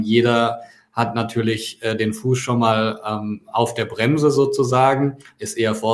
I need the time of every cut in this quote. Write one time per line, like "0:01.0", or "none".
none